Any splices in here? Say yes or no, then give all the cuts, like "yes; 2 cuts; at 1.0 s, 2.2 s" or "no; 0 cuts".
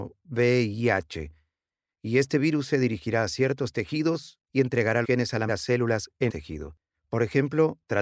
yes; 4 cuts; at 4.4 s, 5.0 s, 5.5 s, 6.3 s